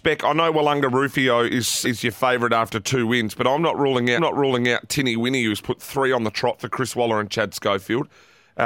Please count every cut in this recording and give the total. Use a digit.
2